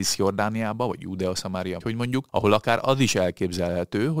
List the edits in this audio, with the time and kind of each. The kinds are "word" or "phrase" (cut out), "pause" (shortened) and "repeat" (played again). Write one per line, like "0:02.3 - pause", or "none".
0:01.8 - word
0:02.3 - pause